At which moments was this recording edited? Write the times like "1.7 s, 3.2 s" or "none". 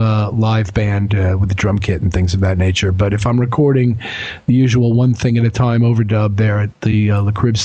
none